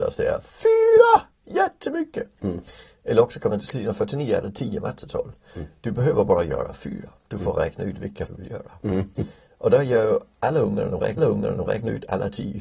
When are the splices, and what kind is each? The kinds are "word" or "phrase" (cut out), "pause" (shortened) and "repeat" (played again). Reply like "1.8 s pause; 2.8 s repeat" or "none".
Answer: 1.3 s pause; 3.6 s word; 8.3 s word; 11.2 s repeat